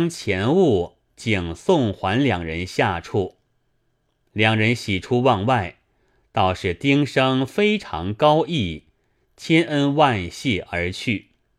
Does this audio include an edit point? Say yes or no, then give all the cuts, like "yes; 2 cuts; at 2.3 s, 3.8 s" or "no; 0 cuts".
no; 0 cuts